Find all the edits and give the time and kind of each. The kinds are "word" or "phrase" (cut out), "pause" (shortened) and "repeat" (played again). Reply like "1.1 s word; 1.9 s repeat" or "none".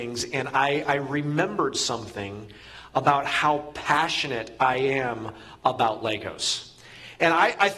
none